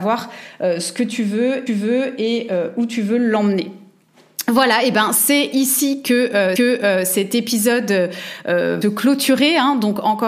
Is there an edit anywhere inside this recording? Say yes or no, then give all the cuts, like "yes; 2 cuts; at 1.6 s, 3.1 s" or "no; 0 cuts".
yes; 3 cuts; at 1.7 s, 6.6 s, 8.8 s